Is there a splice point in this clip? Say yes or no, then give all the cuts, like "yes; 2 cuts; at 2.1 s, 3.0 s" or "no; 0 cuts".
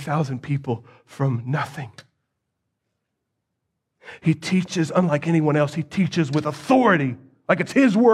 no; 0 cuts